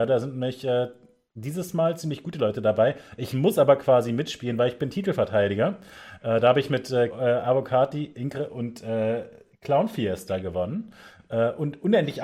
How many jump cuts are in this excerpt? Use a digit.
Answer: 1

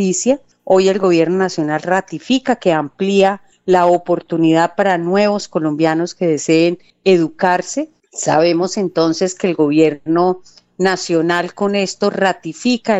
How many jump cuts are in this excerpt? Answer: 0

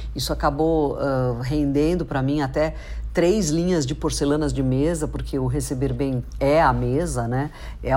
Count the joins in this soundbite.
0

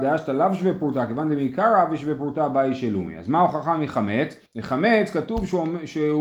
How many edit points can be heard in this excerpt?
1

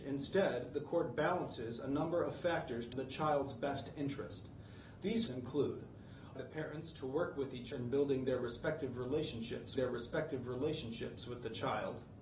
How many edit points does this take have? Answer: 5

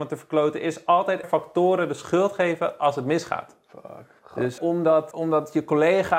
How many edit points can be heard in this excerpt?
4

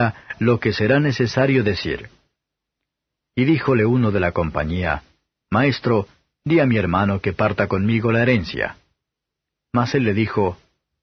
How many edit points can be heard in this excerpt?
0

